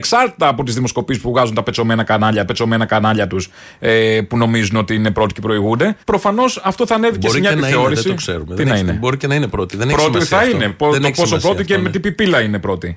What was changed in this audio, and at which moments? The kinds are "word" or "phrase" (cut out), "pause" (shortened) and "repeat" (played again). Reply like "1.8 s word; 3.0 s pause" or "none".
2.5 s repeat; 6.0 s pause